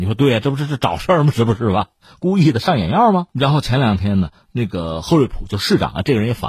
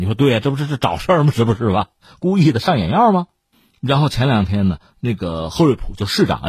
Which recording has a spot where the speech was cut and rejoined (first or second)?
first